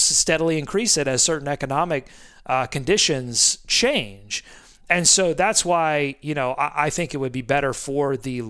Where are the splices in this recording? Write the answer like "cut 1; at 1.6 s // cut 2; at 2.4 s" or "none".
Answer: none